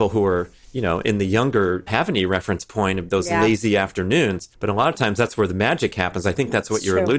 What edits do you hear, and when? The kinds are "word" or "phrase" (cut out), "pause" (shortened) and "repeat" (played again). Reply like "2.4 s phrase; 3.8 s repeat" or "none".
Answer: 1.9 s phrase; 4.5 s pause

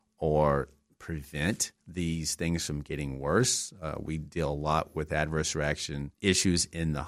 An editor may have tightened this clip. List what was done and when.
1.8 s pause; 6.1 s pause

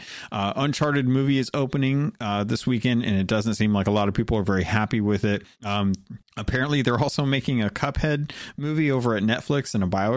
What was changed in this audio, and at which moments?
5.5 s pause

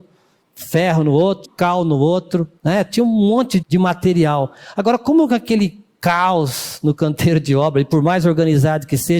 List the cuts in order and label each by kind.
1.4 s phrase; 2.6 s pause; 3.6 s word

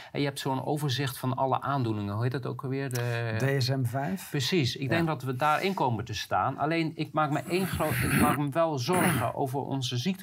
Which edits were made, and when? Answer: none

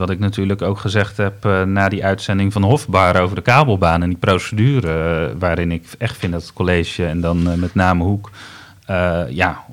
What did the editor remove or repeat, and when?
none

